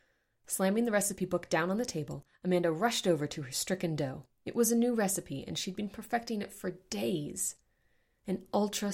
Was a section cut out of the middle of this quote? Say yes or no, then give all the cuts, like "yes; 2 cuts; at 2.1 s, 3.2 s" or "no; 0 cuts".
yes; 1 cut; at 4.3 s